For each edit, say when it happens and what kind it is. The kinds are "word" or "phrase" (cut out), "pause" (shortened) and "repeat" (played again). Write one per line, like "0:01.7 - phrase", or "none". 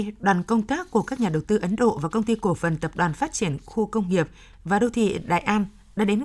none

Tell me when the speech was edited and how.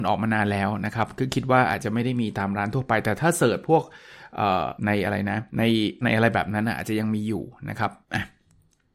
0:04.8 - pause
0:05.5 - pause
0:06.0 - word
0:08.0 - pause

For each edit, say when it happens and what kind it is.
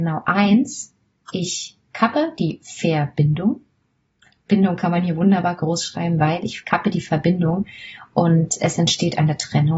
none

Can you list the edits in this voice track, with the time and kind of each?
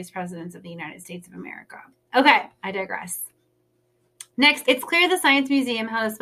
0:04.6 - word

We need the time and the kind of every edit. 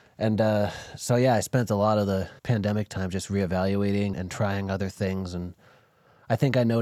0:02.4 - pause
0:04.1 - word

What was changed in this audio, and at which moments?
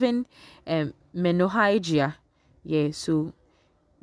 none

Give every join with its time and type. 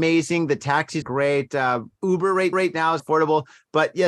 0:01.0 - word
0:02.5 - repeat
0:03.0 - phrase

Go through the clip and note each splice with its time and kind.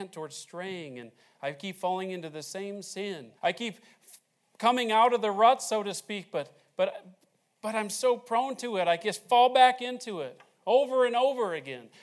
0:03.4 - pause

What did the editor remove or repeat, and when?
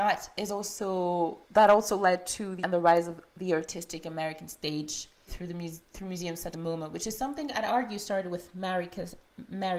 0:01.4 - pause
0:02.6 - word
0:05.3 - word
0:06.5 - word

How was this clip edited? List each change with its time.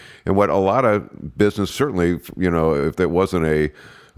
0:01.7 - word

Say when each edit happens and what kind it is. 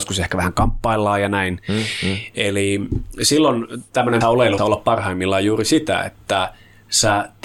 0:04.2 - word
0:04.6 - phrase

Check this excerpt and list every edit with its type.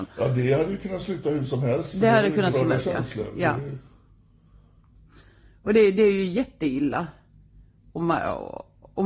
0:02.5 - phrase

